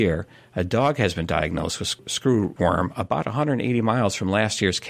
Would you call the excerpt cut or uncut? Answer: uncut